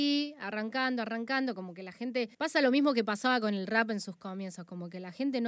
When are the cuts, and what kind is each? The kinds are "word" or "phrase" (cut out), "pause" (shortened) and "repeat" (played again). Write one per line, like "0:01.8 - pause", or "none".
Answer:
0:02.3 - pause